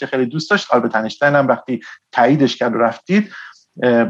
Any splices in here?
no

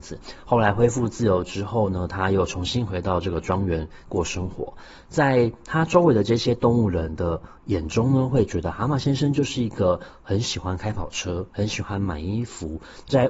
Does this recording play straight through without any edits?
no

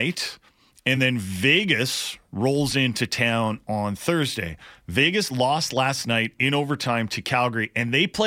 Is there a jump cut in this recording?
no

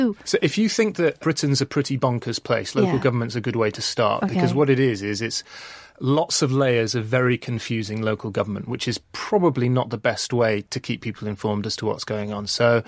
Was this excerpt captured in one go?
yes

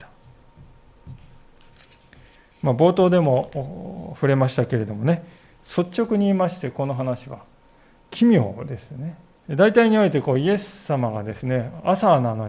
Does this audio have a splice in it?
yes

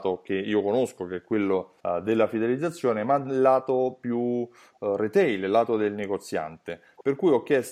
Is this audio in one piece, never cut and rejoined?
no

